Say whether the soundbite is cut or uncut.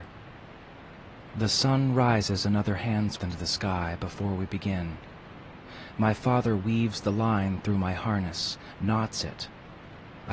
cut